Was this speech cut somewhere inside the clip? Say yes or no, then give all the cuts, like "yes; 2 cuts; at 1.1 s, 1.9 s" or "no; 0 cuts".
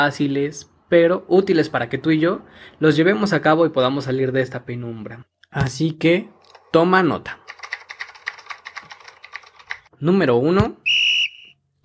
yes; 1 cut; at 9.9 s